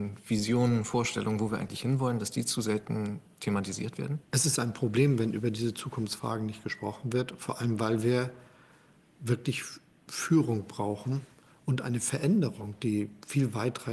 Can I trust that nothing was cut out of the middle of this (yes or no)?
no